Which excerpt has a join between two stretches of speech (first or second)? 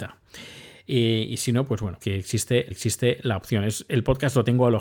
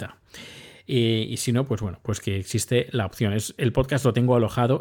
first